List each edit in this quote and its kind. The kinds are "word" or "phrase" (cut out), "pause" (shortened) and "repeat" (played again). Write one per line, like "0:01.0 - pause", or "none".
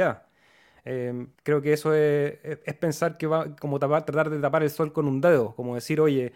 0:01.3 - pause